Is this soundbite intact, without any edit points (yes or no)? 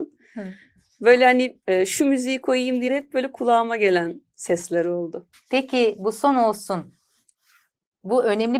no